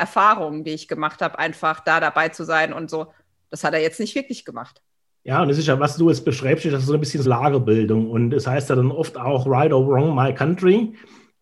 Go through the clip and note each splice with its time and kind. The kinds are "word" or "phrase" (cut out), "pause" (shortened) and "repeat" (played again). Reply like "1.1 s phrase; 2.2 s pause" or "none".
7.2 s word